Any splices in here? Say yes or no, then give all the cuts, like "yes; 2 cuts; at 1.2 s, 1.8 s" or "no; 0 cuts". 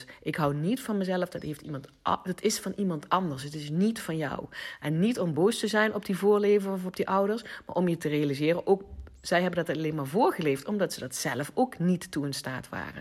no; 0 cuts